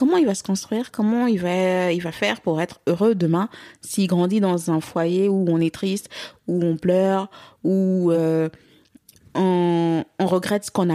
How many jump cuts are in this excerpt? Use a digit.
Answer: 0